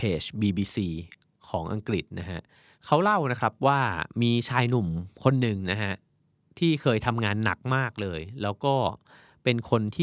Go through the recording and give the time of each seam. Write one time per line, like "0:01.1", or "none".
none